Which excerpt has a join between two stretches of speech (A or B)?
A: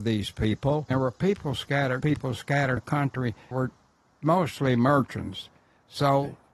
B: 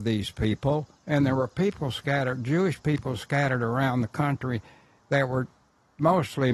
A